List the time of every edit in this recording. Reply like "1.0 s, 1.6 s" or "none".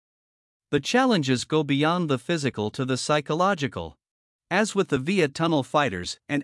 4.3 s, 5.3 s